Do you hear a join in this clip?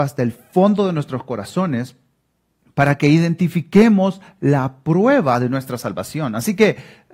no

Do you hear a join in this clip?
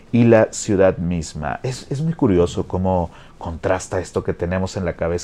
no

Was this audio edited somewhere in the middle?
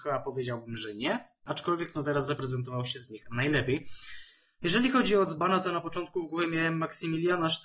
no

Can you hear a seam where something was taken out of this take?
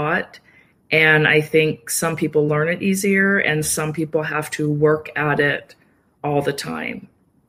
no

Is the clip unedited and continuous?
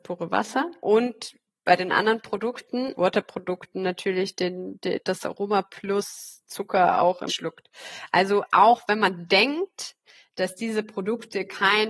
no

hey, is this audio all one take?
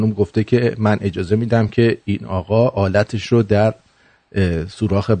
yes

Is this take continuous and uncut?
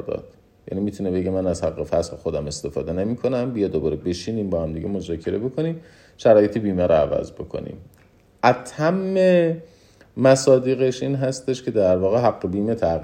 yes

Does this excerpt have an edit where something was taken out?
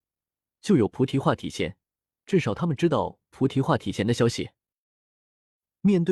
no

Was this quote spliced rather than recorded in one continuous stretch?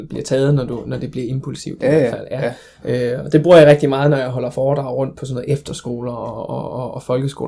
no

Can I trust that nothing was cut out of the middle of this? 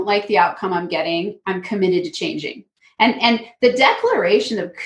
yes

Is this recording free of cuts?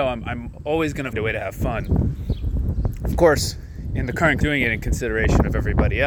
no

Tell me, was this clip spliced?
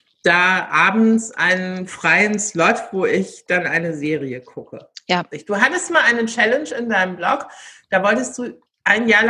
yes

